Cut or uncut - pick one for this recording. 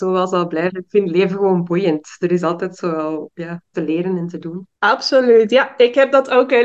cut